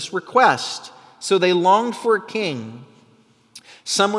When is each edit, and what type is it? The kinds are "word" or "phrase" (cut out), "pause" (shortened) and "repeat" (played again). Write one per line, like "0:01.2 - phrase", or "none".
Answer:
none

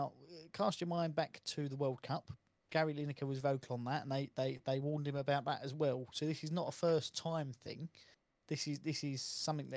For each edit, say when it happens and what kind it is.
0:03.4 - word

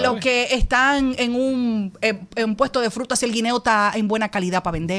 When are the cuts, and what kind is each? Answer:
none

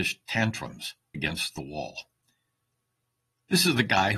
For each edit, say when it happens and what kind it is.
0:01.1 - word

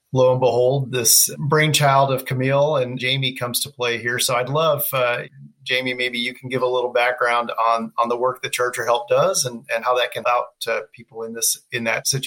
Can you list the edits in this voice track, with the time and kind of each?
0:10.2 - word

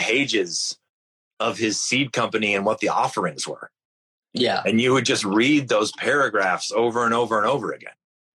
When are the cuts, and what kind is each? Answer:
none

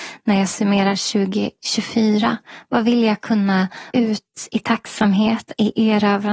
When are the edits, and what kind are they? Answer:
0:03.9 - word

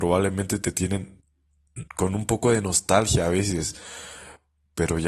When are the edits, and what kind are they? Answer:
0:01.9 - pause

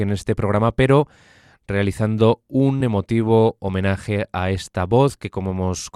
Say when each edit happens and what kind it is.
none

